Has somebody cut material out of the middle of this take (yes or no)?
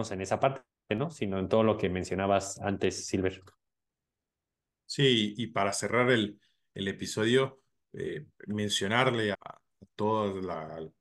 yes